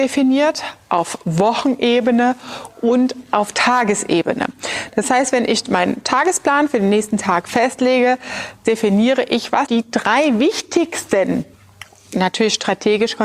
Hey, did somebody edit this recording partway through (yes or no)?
yes